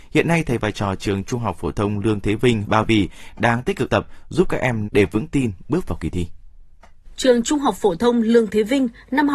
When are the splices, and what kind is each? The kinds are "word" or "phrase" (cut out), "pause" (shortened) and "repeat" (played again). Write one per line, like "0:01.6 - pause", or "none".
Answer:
0:02.6 - word
0:03.9 - word
0:04.9 - phrase